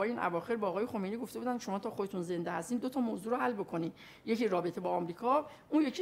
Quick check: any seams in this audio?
no; 0 cuts

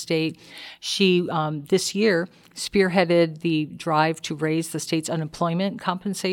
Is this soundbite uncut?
yes; 0 cuts

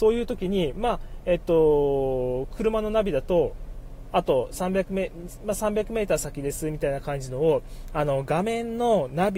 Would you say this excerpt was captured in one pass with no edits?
yes; 0 cuts

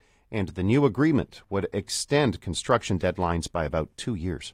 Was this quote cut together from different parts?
no; 0 cuts

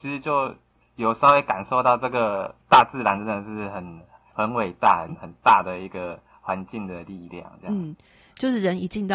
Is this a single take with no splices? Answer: no; 1 cut; at 5.1 s

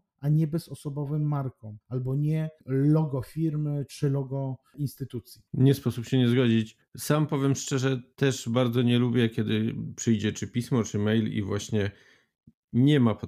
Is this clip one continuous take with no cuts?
no; 4 cuts; at 1.8 s, 2.6 s, 5.5 s, 6.8 s

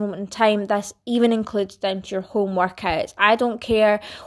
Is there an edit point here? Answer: no; 0 cuts

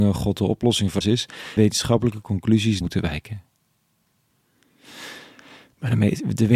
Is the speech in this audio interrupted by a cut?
yes; 3 cuts; at 1.0 s, 1.6 s, 2.8 s

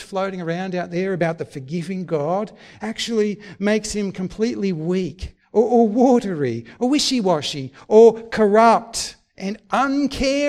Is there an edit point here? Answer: no; 0 cuts

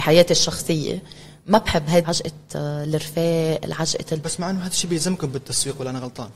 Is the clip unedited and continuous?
no; 1 cut; at 2.0 s

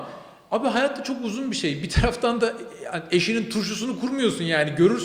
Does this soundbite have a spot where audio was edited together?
no; 0 cuts

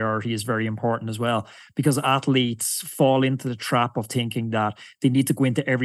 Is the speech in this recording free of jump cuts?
yes; 0 cuts

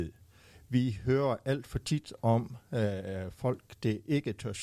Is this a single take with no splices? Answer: yes; 0 cuts

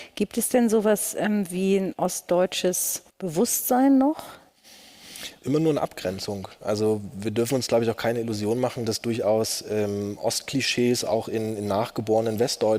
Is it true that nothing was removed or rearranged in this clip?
no; 1 cut; at 3.1 s

